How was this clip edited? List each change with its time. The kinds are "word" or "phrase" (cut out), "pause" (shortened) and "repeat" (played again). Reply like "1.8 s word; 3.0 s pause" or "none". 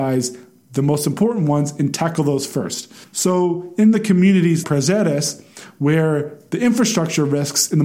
3.0 s pause; 4.6 s word